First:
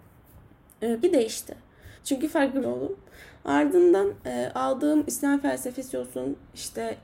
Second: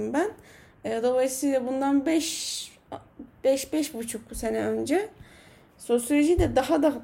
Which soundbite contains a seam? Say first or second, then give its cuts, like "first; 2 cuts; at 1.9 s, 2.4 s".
first; 3 cuts; at 1.0 s, 2.0 s, 2.6 s